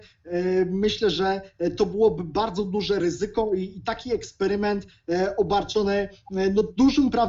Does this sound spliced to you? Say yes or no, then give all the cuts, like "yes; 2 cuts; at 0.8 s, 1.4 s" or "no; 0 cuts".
no; 0 cuts